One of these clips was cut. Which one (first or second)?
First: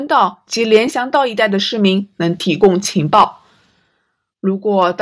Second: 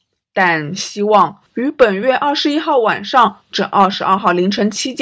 second